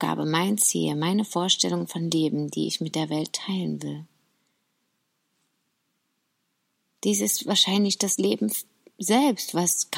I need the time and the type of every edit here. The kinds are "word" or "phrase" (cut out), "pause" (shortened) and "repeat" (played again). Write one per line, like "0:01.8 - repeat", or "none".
none